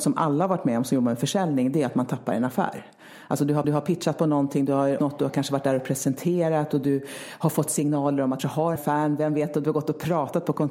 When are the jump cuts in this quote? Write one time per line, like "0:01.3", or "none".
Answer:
0:03.6
0:05.0
0:08.4
0:08.8